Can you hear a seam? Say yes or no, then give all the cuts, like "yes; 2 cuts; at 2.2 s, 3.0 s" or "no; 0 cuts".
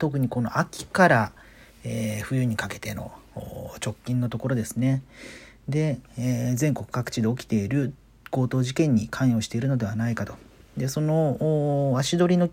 no; 0 cuts